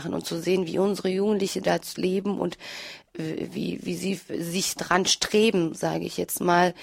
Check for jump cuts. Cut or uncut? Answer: uncut